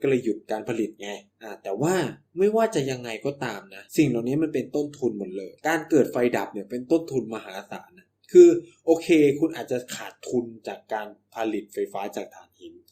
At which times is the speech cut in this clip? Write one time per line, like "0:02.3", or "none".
0:01.3
0:02.3
0:03.9
0:05.6

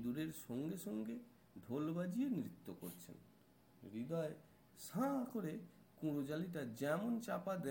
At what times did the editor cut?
none

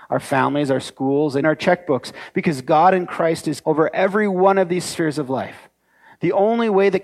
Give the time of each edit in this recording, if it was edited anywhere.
0:01.4
0:03.6

